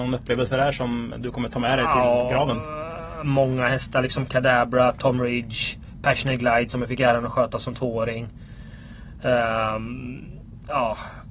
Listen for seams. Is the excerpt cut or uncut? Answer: uncut